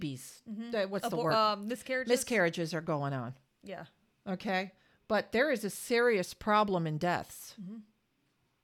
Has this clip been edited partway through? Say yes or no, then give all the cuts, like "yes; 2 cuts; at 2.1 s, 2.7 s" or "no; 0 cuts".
no; 0 cuts